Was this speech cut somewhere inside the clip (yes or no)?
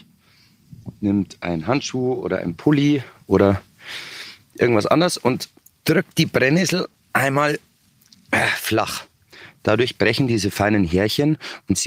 yes